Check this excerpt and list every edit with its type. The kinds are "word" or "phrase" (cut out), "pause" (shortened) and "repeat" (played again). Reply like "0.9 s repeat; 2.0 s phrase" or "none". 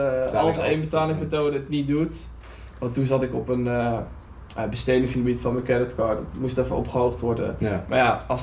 none